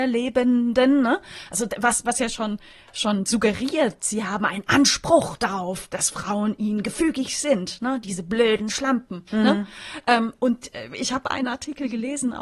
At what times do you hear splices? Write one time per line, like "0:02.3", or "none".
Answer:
0:09.3

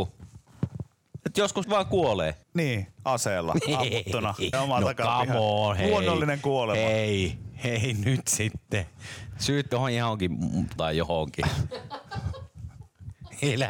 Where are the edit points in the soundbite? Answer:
0:01.6
0:02.4
0:04.5
0:09.7
0:10.8

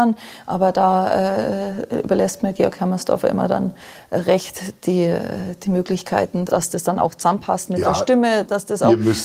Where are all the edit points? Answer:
0:06.5

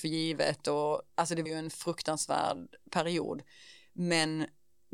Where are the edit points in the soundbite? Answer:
0:01.1
0:01.5

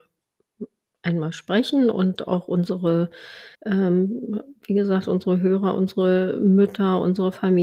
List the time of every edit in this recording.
0:03.5

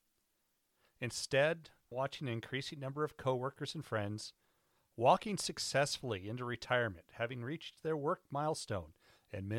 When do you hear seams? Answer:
0:01.9

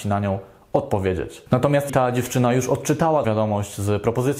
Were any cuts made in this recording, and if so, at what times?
0:01.9
0:03.2

